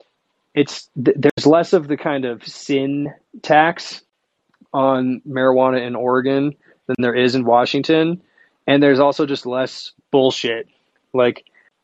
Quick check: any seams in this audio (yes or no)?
no